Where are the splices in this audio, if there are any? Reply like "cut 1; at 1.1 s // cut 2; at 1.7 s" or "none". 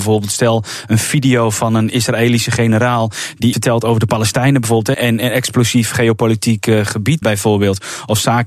cut 1; at 3.5 s // cut 2; at 4.9 s // cut 3; at 7.2 s